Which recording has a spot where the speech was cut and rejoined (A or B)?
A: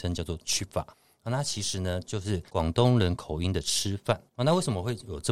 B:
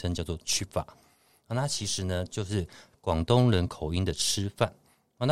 A